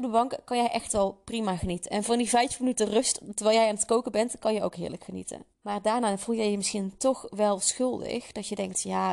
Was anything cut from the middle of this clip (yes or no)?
yes